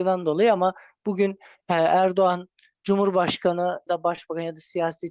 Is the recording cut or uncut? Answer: cut